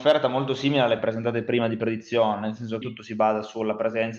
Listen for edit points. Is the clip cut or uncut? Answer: cut